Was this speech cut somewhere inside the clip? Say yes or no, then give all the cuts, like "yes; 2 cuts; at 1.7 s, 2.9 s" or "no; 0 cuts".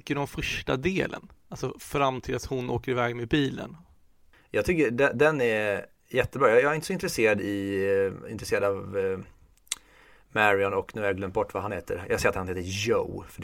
no; 0 cuts